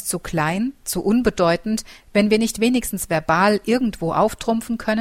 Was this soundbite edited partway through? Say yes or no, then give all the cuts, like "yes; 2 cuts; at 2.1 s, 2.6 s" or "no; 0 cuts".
no; 0 cuts